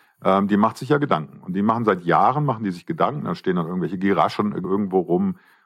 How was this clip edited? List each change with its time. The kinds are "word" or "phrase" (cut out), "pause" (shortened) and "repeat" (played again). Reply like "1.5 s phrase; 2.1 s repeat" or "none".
4.6 s word